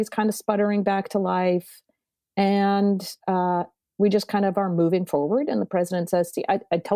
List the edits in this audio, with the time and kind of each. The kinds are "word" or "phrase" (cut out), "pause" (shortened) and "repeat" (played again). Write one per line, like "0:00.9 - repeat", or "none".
none